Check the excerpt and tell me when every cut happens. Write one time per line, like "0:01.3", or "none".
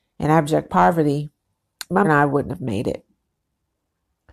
0:02.0